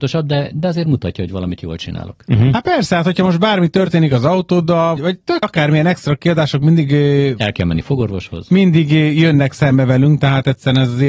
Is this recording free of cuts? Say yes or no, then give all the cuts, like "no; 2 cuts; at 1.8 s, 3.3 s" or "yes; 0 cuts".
no; 2 cuts; at 5.0 s, 5.4 s